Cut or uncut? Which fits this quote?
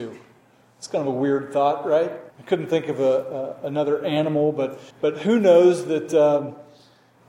cut